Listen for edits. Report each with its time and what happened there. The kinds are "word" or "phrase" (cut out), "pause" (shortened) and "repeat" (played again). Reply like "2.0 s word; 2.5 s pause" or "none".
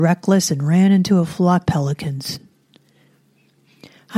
1.6 s word